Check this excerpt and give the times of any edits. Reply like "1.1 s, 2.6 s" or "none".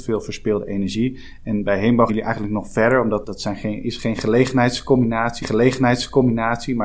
2.1 s, 3.2 s, 5.4 s